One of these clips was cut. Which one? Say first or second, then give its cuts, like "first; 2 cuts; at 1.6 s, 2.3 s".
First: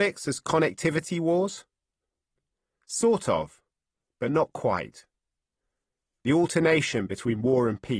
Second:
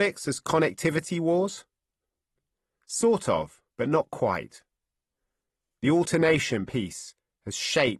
second; 2 cuts; at 3.7 s, 6.7 s